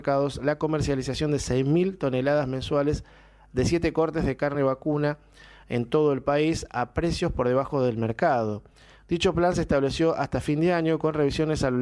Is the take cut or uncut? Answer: uncut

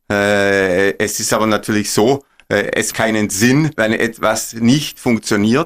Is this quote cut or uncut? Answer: cut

